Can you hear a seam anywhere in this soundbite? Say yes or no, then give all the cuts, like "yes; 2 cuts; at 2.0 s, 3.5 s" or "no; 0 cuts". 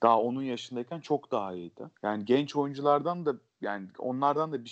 yes; 1 cut; at 2.0 s